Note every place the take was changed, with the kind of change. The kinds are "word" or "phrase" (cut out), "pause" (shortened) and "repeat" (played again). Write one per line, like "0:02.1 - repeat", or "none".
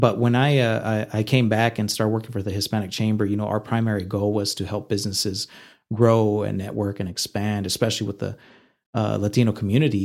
none